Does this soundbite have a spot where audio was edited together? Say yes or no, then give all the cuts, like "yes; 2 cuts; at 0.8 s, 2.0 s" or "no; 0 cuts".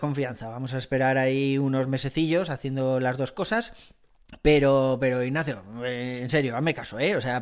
no; 0 cuts